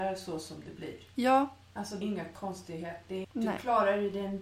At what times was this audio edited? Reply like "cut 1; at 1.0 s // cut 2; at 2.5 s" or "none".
cut 1; at 2.0 s // cut 2; at 3.2 s